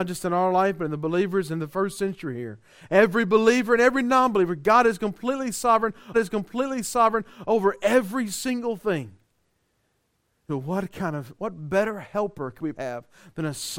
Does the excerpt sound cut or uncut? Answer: cut